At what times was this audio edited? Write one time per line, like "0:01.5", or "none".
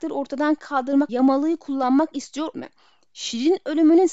0:01.1
0:02.5